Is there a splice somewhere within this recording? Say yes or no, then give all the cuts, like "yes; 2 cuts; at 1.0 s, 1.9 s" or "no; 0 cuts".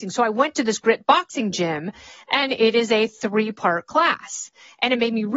no; 0 cuts